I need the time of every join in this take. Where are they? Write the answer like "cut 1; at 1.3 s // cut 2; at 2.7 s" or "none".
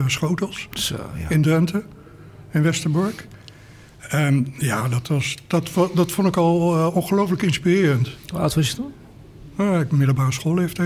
none